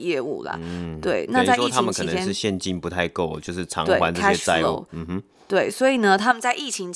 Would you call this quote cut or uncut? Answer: uncut